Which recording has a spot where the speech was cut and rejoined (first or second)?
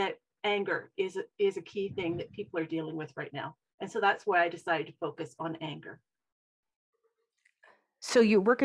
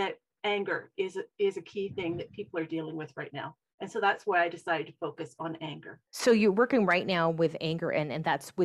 second